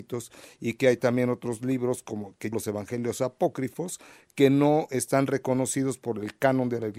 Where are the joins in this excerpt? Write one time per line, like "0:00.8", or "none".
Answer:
0:02.5